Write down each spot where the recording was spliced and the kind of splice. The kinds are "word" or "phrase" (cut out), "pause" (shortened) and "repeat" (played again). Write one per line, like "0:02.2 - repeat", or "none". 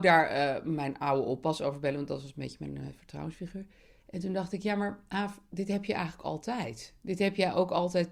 none